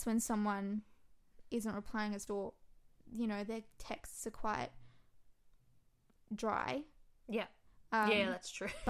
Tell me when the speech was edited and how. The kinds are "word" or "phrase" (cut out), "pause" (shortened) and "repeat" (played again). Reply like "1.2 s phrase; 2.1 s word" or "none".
2.3 s word

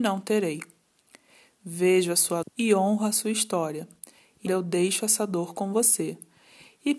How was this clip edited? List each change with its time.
2.4 s word; 4.5 s word

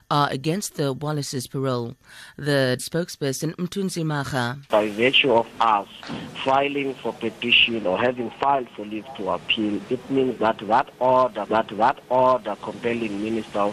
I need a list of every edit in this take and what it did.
2.8 s word; 11.5 s repeat

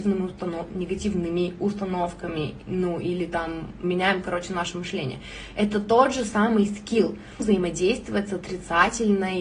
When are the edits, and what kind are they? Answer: 3.8 s word; 7.4 s phrase

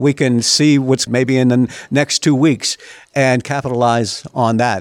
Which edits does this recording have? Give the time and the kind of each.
1.1 s phrase

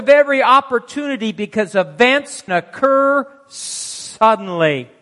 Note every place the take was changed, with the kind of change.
2.5 s word

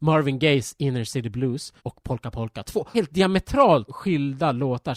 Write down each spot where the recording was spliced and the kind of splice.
1.8 s pause; 2.9 s word; 3.9 s word

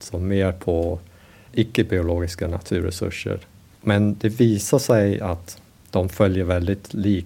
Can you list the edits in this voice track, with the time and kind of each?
none

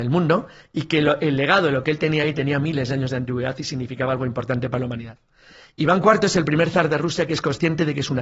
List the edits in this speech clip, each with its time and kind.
none

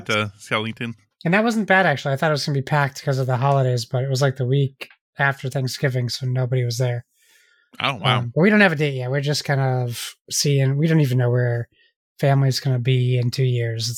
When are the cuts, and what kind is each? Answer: none

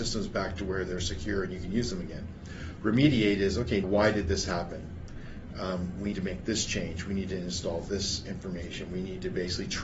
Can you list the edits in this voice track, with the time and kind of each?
3.8 s word; 6.1 s word

